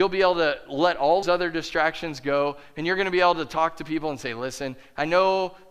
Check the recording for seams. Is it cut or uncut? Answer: cut